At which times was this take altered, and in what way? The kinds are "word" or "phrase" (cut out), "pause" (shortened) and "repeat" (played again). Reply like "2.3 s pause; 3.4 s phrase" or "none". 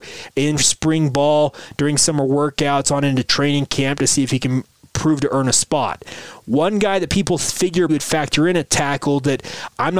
7.9 s word